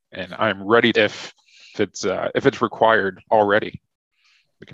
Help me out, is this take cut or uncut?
cut